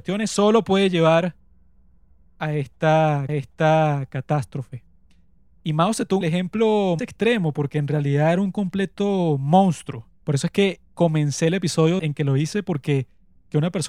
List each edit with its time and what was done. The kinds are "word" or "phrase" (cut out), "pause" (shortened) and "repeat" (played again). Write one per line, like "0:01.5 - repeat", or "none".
0:03.3 - repeat
0:06.2 - phrase
0:07.0 - word
0:10.1 - pause
0:10.8 - pause
0:12.0 - phrase